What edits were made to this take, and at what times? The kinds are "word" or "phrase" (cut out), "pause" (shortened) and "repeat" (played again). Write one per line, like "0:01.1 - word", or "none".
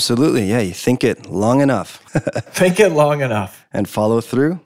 0:02.1 - pause